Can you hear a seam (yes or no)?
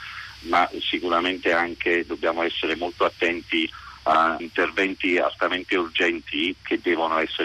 yes